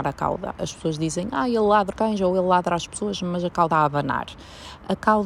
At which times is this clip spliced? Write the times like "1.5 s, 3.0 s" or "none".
1.9 s, 3.7 s